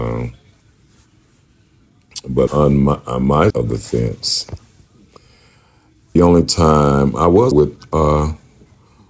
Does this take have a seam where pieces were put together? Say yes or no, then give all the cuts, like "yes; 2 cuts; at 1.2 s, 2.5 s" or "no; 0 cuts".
yes; 4 cuts; at 2.5 s, 3.5 s, 6.2 s, 7.5 s